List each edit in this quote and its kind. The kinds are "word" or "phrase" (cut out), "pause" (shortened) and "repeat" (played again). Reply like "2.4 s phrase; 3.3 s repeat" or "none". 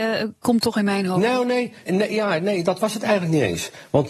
1.9 s word; 2.6 s word